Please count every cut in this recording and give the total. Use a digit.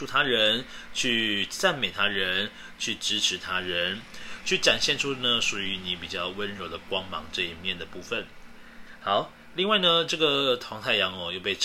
0